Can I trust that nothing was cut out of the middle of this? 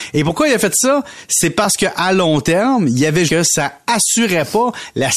no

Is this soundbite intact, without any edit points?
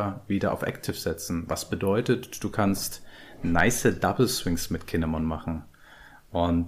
yes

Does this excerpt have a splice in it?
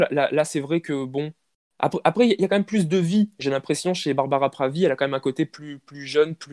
no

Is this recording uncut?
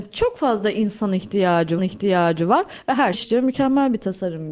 no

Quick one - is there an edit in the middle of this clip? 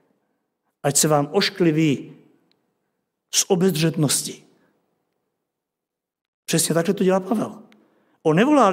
no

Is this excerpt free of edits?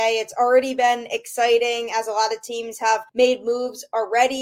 no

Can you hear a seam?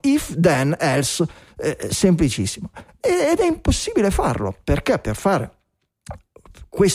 no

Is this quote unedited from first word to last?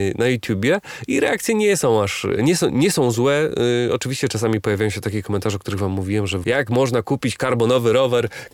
no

